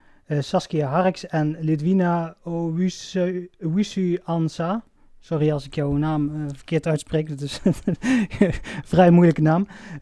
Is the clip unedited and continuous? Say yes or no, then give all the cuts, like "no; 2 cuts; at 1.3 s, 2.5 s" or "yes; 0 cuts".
yes; 0 cuts